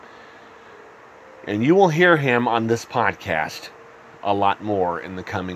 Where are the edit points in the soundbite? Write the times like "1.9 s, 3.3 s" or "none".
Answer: none

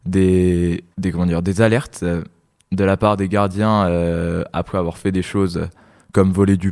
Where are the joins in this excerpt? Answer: 0.9 s

